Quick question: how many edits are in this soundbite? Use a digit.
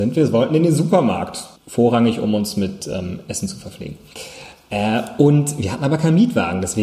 1